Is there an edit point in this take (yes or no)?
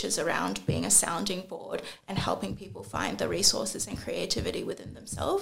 no